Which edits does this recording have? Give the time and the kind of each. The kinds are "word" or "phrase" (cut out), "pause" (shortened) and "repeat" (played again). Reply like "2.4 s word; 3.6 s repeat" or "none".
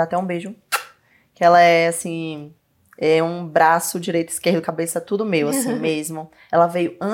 none